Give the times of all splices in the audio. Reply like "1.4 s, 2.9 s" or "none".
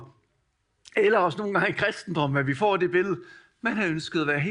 none